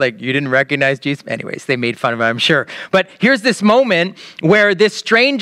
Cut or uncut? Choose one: uncut